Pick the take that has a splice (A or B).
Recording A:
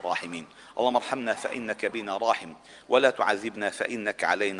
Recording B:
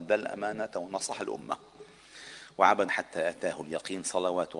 B